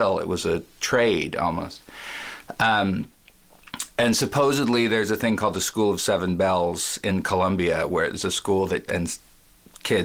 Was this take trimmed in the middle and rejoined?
yes; 1 cut; at 8.9 s

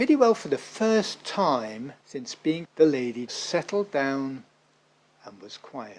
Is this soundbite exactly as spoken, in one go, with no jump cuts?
no; 3 cuts; at 2.0 s, 2.6 s, 3.3 s

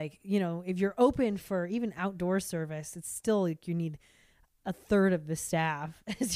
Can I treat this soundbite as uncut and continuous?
yes; 0 cuts

